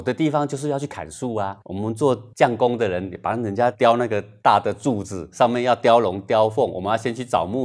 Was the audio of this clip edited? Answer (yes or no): yes